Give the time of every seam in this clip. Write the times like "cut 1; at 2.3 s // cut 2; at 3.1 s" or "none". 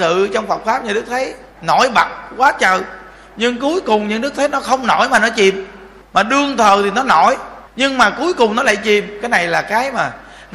cut 1; at 1.5 s // cut 2; at 6.0 s // cut 3; at 7.7 s